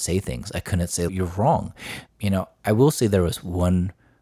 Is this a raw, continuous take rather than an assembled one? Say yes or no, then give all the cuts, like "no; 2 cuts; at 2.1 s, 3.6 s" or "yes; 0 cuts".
no; 1 cut; at 1.1 s